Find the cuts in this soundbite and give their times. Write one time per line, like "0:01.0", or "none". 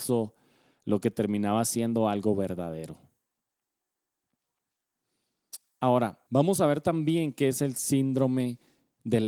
0:06.3